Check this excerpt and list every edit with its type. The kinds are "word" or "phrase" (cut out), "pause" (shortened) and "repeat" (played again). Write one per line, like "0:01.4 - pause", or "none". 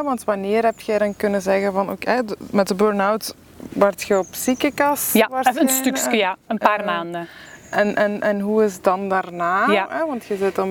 none